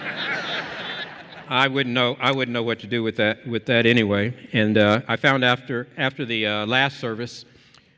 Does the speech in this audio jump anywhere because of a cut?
no; 0 cuts

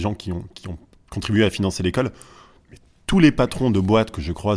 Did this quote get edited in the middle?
no; 0 cuts

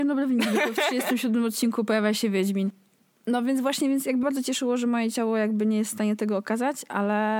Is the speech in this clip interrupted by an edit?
yes; 1 cut; at 4.2 s

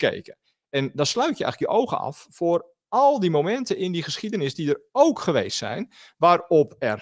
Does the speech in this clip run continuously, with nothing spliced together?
yes; 0 cuts

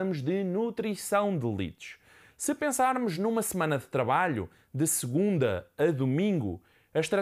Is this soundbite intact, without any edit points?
yes; 0 cuts

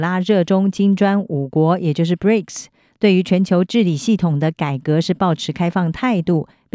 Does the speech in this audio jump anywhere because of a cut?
no; 0 cuts

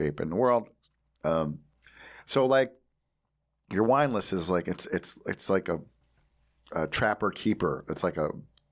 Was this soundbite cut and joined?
no; 0 cuts

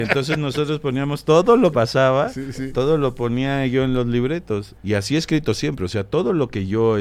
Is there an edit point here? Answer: yes; 2 cuts; at 1.7 s, 4.8 s

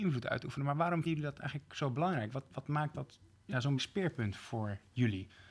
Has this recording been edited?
yes; 3 cuts; at 1.1 s, 3.3 s, 3.8 s

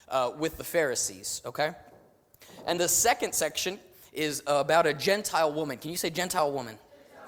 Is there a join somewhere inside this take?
yes; 1 cut; at 2.8 s

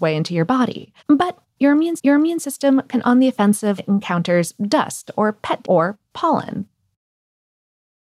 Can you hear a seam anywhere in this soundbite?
yes; 5 cuts; at 1.0 s, 2.0 s, 3.0 s, 3.8 s, 5.6 s

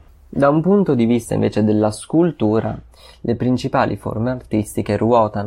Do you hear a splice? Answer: no; 0 cuts

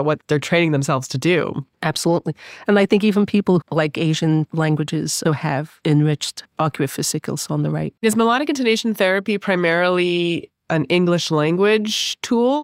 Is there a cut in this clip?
yes; 4 cuts; at 1.7 s, 3.6 s, 5.2 s, 8.0 s

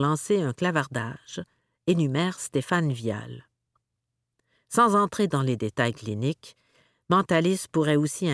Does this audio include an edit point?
no; 0 cuts

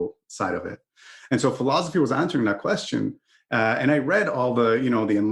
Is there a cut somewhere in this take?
no; 0 cuts

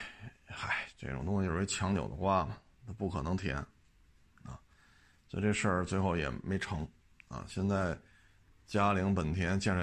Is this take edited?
no; 0 cuts

